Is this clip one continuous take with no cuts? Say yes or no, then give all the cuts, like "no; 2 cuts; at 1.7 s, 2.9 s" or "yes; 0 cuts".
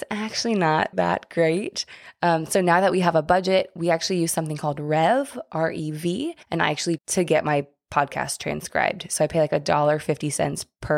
no; 3 cuts; at 0.9 s, 6.4 s, 7.0 s